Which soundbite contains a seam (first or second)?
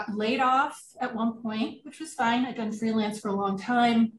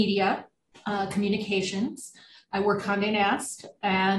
second